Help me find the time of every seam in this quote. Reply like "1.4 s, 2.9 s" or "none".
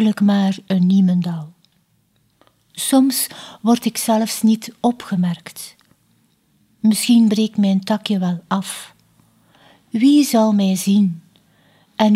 none